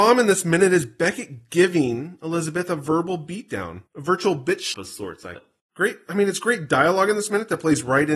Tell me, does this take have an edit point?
yes; 3 cuts; at 3.9 s, 4.7 s, 5.4 s

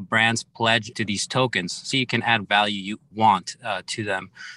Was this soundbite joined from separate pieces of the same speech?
yes; 4 cuts; at 0.9 s, 1.9 s, 2.4 s, 3.1 s

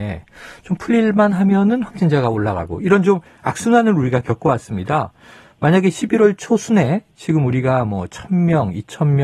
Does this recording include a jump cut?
no; 0 cuts

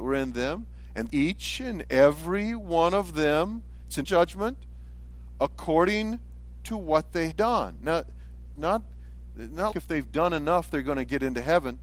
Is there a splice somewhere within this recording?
yes; 5 cuts; at 1.1 s, 4.0 s, 7.3 s, 8.6 s, 9.7 s

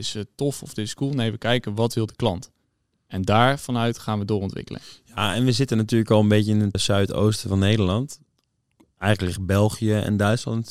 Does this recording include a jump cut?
yes; 1 cut; at 6.7 s

